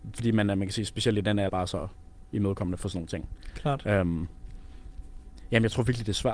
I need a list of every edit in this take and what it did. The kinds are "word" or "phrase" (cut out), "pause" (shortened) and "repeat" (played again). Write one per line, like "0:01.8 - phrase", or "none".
0:01.5 - word